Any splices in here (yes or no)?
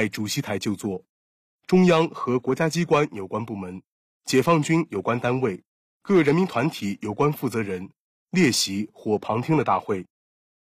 no